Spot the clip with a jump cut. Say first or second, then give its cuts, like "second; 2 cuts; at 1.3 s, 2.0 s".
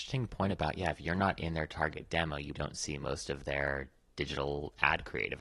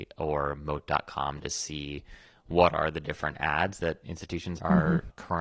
first; 1 cut; at 2.5 s